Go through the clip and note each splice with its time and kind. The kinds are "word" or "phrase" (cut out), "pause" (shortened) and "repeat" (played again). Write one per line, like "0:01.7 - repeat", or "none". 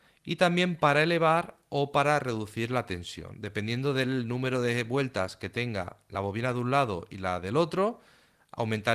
none